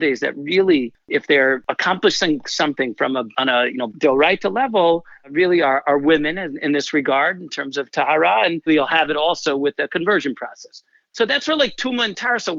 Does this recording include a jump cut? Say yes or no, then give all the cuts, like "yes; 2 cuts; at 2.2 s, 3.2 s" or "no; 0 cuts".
yes; 2 cuts; at 3.9 s, 8.7 s